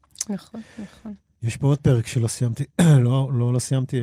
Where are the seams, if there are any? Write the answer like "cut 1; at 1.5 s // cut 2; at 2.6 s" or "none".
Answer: none